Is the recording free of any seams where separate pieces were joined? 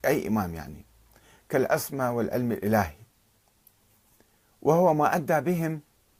yes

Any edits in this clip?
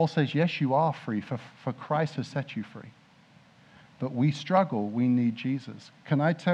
no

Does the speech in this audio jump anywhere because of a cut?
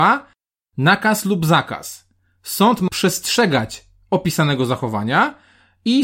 yes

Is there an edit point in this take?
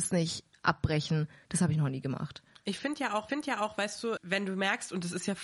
yes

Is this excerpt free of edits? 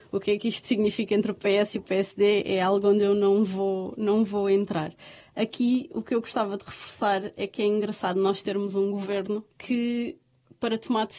no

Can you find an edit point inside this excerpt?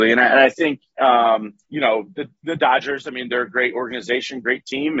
yes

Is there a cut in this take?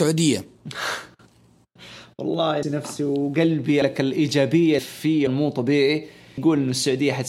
yes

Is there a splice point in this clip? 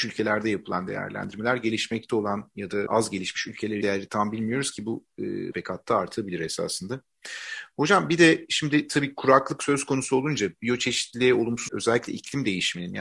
yes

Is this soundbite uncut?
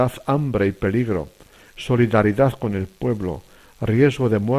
yes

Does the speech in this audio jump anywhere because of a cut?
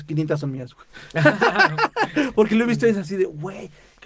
no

